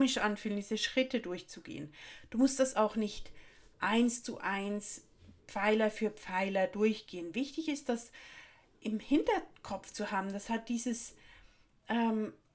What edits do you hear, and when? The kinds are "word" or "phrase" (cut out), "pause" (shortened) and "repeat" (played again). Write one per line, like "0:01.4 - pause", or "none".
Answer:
none